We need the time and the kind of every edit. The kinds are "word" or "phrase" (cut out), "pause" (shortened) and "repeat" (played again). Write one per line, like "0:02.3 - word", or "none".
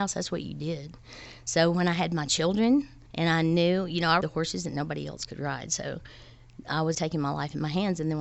0:03.1 - pause
0:04.2 - word
0:06.9 - word